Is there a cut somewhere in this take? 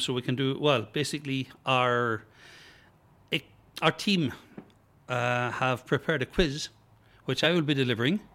no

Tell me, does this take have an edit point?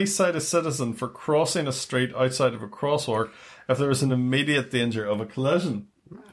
no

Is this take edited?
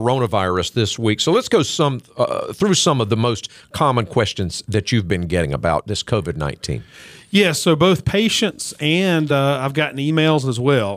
no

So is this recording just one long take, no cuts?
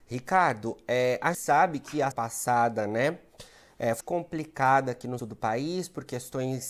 no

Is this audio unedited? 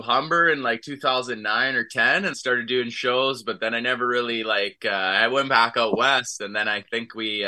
no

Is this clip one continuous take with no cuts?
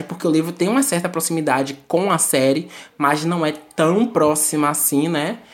yes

